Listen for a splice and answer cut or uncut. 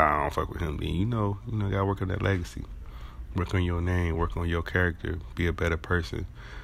uncut